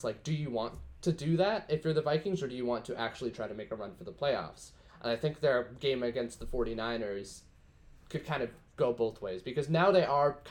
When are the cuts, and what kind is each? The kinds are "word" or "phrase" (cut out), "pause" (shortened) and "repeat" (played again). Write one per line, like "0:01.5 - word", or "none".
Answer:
none